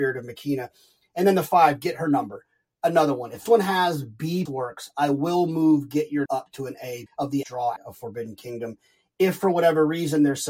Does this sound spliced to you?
yes; 6 cuts; at 3.5 s, 4.5 s, 6.3 s, 7.1 s, 7.4 s, 7.8 s

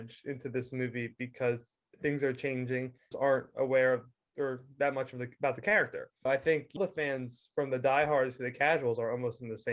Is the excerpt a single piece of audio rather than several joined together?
no; 3 cuts; at 3.1 s, 6.3 s, 6.8 s

